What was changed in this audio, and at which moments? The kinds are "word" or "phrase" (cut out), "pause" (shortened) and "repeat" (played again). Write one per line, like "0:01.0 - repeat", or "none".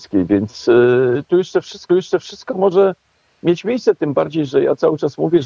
0:01.9 - repeat